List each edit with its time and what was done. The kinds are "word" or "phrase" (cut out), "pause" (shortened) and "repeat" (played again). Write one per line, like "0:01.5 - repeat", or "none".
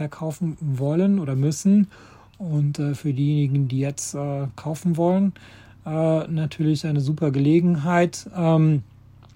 none

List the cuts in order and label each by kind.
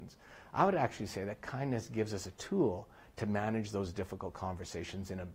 none

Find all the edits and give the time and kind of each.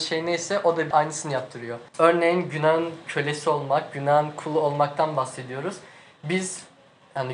0:00.9 - word
0:01.9 - pause

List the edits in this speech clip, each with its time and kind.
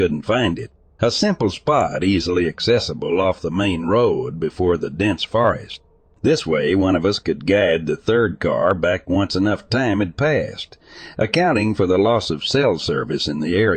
none

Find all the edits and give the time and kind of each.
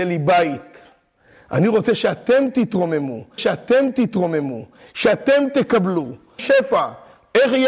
0:03.4 - repeat
0:06.4 - phrase

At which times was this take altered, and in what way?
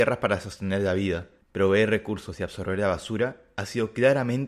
none

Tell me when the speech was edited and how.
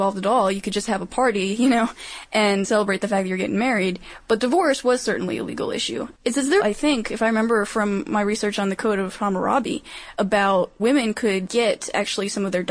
0:02.6 - word
0:06.1 - pause
0:06.6 - phrase
0:10.8 - word

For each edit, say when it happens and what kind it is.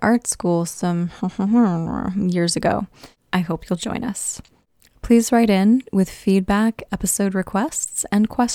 none

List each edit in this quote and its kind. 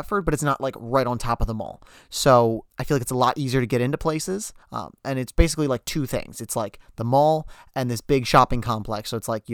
0:02.7 - pause
0:04.6 - pause

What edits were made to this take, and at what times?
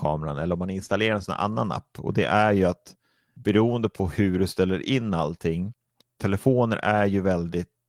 none

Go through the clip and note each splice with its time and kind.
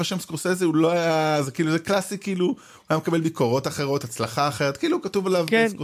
none

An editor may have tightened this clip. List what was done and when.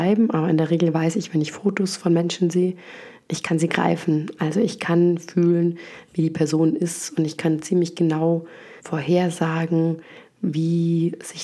0:08.8 - pause

